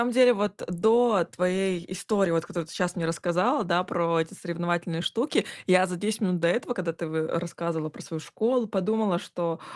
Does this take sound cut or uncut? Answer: uncut